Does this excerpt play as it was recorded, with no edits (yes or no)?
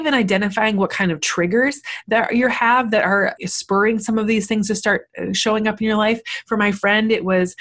no